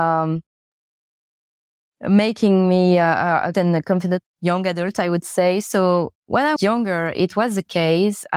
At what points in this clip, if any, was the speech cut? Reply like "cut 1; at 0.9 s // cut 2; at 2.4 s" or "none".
cut 1; at 3.5 s // cut 2; at 6.6 s